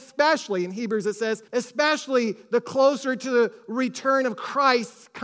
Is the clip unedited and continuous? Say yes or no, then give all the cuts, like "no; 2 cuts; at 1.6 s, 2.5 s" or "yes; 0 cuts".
no; 1 cut; at 1.5 s